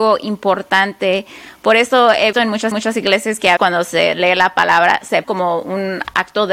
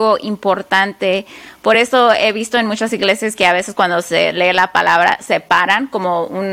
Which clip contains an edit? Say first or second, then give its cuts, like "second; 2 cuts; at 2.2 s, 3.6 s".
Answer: first; 4 cuts; at 2.3 s, 2.7 s, 3.6 s, 5.2 s